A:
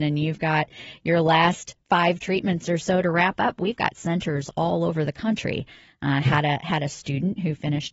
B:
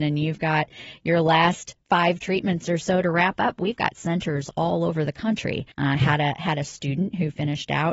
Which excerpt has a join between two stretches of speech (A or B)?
B